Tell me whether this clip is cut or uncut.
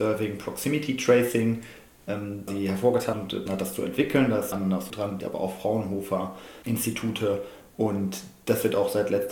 cut